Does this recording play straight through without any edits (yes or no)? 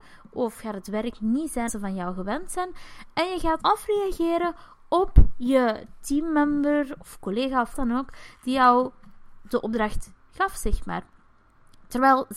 no